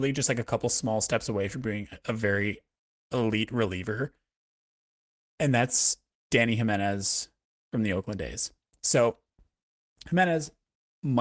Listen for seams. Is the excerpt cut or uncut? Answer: uncut